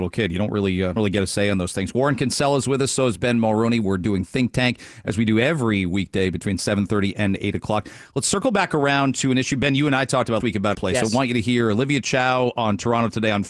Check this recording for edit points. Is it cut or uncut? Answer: cut